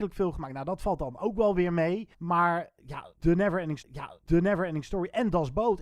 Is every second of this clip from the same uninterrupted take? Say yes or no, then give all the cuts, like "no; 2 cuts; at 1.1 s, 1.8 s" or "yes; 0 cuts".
no; 2 cuts; at 2.1 s, 3.8 s